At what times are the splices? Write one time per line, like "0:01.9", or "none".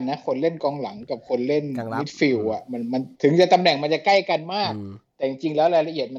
0:03.1